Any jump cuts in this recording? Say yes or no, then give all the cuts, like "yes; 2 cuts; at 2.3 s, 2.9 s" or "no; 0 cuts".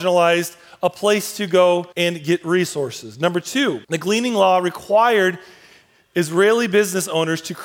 yes; 2 cuts; at 1.9 s, 3.8 s